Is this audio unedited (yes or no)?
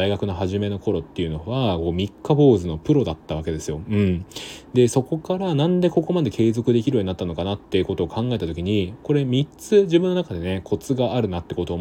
no